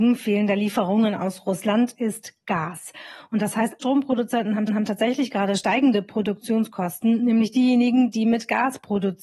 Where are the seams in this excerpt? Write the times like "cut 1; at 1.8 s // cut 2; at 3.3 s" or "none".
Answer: cut 1; at 3.8 s // cut 2; at 4.7 s